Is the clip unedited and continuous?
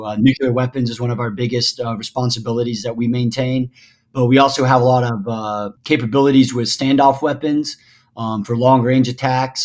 yes; 0 cuts

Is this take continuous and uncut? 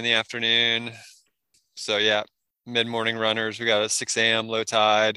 yes; 0 cuts

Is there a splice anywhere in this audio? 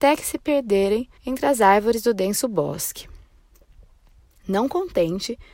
yes; 1 cut; at 1.2 s

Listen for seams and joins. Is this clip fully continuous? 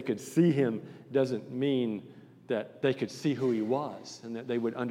yes; 0 cuts

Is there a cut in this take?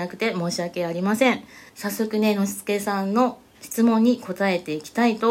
yes; 2 cuts; at 1.7 s, 3.5 s

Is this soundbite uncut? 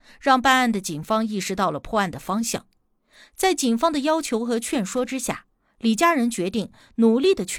yes; 0 cuts

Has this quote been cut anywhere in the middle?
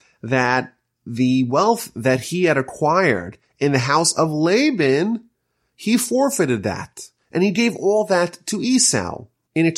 no; 0 cuts

